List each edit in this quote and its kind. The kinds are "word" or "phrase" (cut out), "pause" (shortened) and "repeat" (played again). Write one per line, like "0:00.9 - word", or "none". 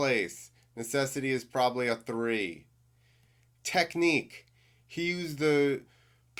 none